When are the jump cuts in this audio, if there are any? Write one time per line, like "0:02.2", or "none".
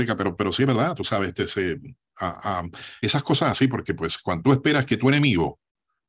0:03.5